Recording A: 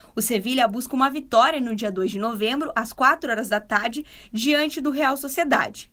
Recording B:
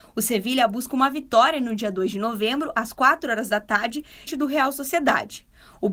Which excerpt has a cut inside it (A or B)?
B